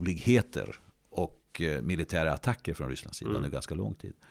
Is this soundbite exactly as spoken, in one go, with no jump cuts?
yes; 0 cuts

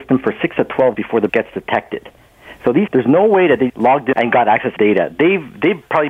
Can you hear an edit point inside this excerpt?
yes; 6 cuts; at 0.9 s, 1.3 s, 2.9 s, 3.7 s, 4.1 s, 4.8 s

